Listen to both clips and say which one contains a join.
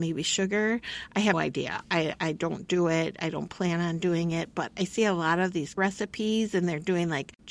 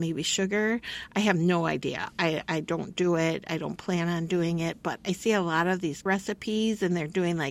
first; 1 cut; at 1.3 s

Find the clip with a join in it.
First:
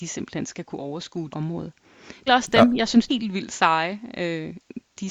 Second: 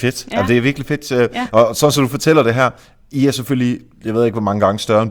first; 3 cuts; at 1.3 s, 2.3 s, 3.1 s

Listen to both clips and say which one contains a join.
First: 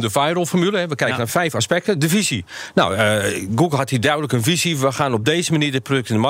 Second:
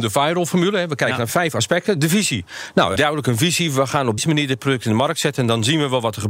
second; 2 cuts; at 3.0 s, 4.2 s

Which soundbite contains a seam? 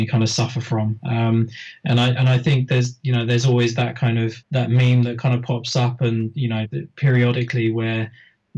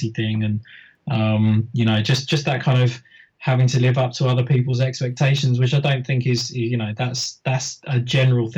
first; 1 cut; at 4.4 s

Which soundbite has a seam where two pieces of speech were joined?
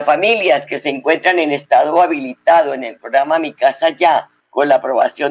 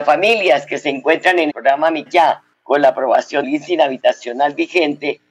second; 3 cuts; at 1.5 s, 2.1 s, 3.4 s

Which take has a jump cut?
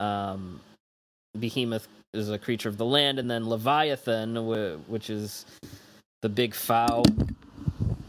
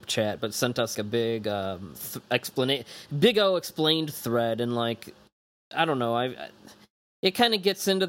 second; 1 cut; at 0.9 s

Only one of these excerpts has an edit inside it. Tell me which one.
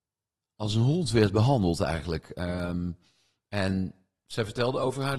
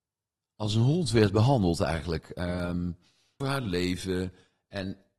second; 1 cut; at 3.4 s

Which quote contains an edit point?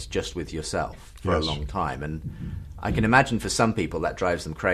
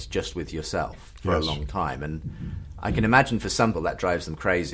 second; 1 cut; at 3.7 s

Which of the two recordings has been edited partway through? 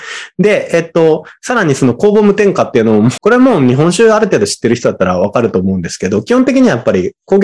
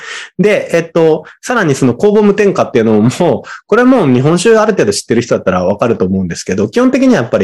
first; 1 cut; at 3.2 s

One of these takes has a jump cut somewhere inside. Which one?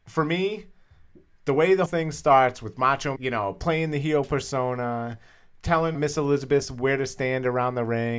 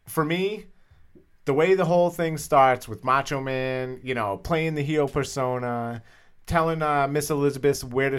first; 3 cuts; at 1.9 s, 3.2 s, 5.9 s

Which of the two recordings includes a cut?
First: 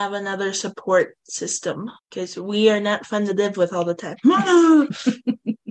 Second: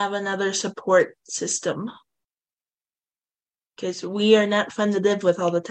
first; 1 cut; at 2.0 s

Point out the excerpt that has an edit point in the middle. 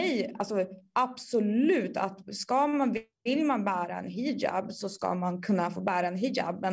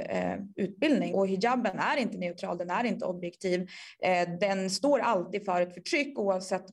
second; 1 cut; at 1.1 s

